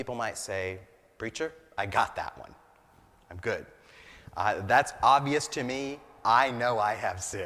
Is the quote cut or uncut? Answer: uncut